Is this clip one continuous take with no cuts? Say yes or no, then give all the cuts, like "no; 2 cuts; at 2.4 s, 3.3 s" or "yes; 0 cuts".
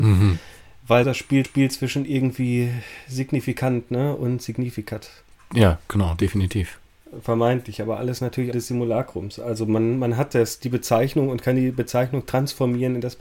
no; 3 cuts; at 1.0 s, 1.4 s, 8.5 s